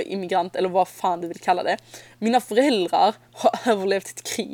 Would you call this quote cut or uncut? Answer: uncut